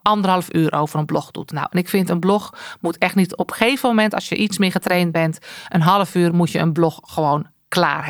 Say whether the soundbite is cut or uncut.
uncut